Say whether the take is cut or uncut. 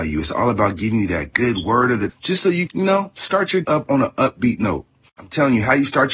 cut